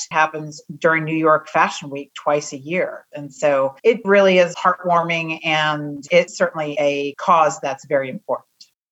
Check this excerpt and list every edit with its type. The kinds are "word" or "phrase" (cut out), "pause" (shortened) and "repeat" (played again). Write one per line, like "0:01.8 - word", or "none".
none

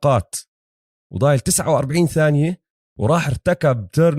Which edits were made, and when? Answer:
none

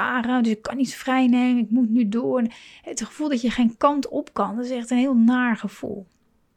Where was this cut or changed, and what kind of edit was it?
none

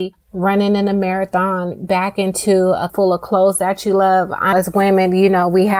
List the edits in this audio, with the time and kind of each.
0:01.9 - word
0:02.9 - word
0:04.5 - word

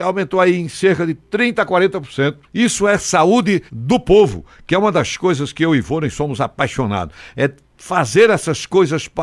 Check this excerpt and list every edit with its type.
0:02.4 - pause
0:03.7 - pause

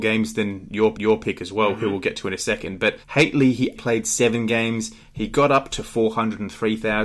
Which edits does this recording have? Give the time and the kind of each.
0:00.9 - repeat
0:03.0 - pause
0:03.8 - word

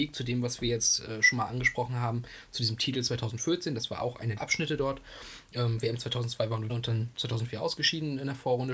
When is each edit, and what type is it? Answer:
0:04.4 - word
0:06.7 - word

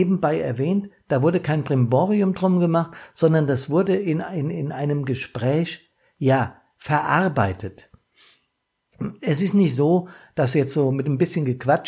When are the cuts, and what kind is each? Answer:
none

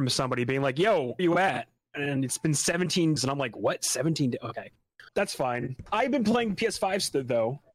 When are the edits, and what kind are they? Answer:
0:01.2 - word
0:03.2 - word
0:05.1 - word

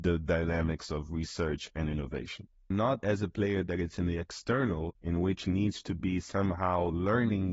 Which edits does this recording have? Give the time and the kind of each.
0:02.7 - word
0:05.0 - pause

